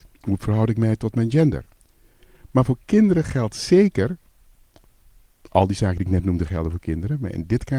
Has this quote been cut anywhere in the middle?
no; 0 cuts

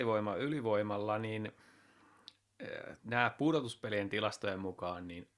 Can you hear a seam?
yes; 1 cut; at 3.0 s

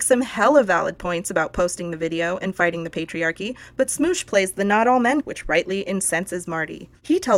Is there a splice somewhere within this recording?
yes; 1 cut; at 5.2 s

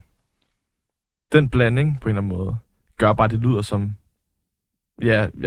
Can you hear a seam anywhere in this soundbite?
no; 0 cuts

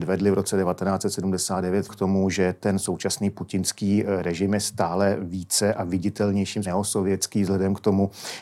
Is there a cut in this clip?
yes; 2 cuts; at 1.9 s, 6.6 s

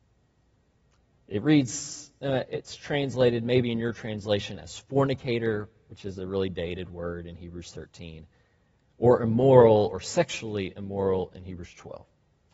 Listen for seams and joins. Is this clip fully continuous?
yes; 0 cuts

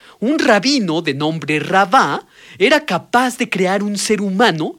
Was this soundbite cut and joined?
no; 0 cuts

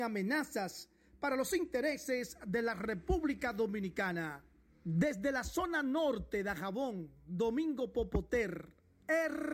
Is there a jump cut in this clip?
no; 0 cuts

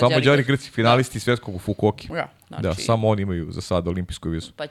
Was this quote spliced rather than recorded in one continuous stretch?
no; 0 cuts

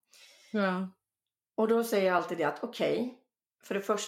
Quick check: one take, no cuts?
yes; 0 cuts

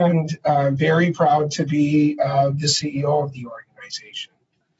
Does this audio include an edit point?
no; 0 cuts

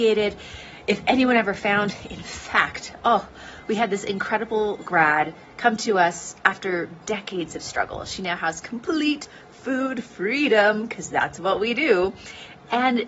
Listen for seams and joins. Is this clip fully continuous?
yes; 0 cuts

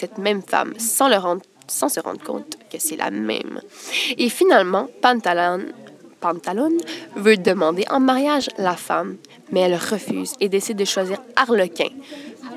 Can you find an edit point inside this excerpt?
no; 0 cuts

